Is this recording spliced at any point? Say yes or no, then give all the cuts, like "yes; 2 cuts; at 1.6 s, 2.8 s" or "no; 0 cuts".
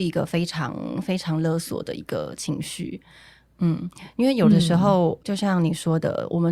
no; 0 cuts